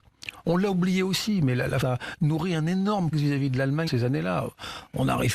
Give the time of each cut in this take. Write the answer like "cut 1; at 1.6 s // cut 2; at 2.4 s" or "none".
cut 1; at 1.8 s // cut 2; at 3.1 s // cut 3; at 3.9 s